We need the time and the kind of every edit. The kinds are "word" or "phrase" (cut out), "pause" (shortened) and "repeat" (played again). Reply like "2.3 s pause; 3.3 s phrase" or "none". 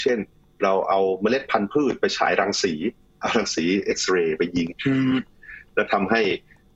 none

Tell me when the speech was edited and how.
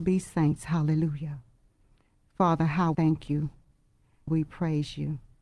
2.9 s word; 4.3 s word

